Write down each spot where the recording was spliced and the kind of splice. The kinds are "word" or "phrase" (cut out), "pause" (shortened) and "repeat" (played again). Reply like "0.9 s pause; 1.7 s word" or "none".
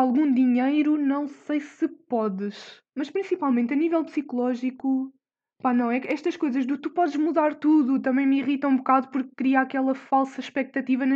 2.9 s pause